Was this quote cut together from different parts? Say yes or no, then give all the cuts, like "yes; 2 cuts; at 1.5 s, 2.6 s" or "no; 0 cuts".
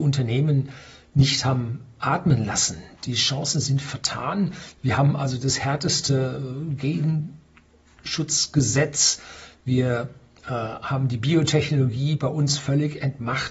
no; 0 cuts